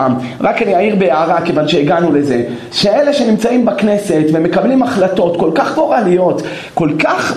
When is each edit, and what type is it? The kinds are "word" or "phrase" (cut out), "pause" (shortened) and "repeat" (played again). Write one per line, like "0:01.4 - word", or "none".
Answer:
none